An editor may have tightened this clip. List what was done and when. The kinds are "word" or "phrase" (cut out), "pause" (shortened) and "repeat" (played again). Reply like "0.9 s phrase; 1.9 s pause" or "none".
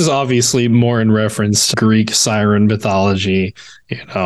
1.7 s word